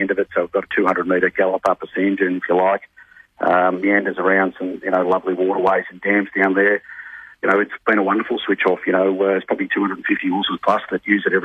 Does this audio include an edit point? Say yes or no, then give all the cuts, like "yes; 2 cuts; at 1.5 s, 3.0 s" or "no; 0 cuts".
no; 0 cuts